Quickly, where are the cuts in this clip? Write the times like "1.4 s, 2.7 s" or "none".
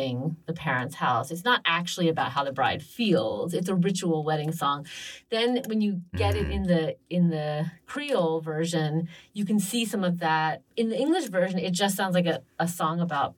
10.7 s